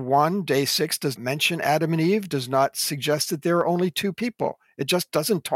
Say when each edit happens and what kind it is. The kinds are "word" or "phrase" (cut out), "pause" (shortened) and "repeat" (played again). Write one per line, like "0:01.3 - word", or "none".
0:01.2 - word